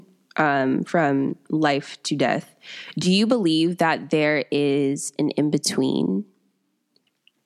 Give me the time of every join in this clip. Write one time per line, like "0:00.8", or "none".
none